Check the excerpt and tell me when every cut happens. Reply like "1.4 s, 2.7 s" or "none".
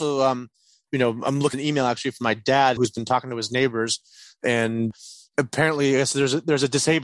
1.5 s, 2.8 s

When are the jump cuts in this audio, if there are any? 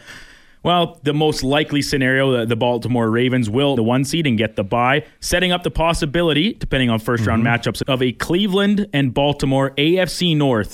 3.8 s, 7.8 s

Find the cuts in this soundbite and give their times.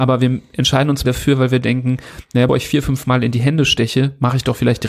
1.0 s, 2.5 s

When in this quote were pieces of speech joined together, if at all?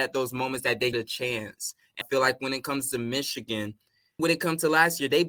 0.9 s, 2.0 s, 4.2 s

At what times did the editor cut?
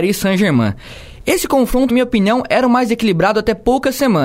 1.9 s

